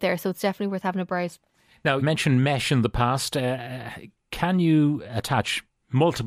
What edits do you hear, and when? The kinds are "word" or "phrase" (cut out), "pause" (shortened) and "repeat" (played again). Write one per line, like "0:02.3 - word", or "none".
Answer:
0:02.0 - word
0:05.1 - word